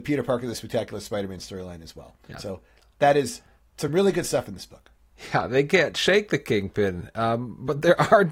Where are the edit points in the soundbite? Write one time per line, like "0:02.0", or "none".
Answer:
none